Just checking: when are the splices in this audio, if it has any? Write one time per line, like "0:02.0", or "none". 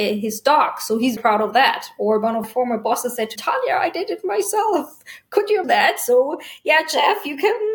0:01.2
0:02.4
0:03.4
0:05.6